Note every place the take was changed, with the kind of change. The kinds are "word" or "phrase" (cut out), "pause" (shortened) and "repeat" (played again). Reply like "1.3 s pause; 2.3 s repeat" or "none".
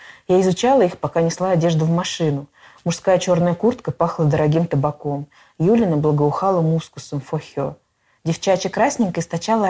none